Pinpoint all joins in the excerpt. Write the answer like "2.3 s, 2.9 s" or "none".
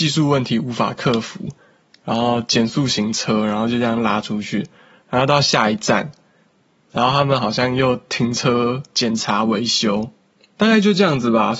none